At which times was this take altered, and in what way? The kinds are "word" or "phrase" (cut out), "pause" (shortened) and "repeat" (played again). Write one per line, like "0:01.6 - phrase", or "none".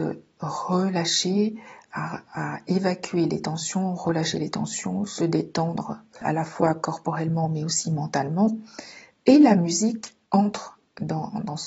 0:10.3 - pause